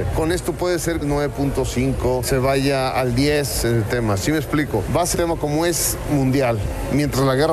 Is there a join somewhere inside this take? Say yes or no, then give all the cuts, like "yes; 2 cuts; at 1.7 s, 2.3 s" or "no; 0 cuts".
yes; 2 cuts; at 1.0 s, 5.1 s